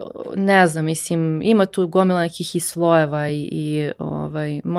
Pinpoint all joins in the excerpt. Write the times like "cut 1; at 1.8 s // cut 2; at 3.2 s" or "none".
none